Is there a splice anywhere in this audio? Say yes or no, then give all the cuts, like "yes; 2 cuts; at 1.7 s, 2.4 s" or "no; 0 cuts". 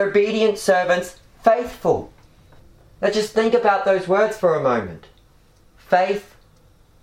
no; 0 cuts